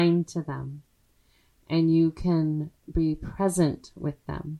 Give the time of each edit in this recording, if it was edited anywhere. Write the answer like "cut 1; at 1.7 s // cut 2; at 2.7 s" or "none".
none